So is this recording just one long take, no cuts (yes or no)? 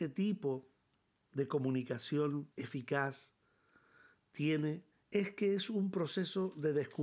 no